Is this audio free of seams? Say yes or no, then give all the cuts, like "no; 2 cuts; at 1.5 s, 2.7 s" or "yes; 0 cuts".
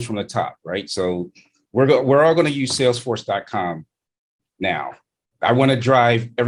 yes; 0 cuts